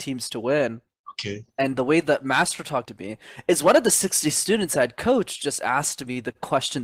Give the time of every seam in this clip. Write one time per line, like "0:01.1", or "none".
0:01.5
0:02.9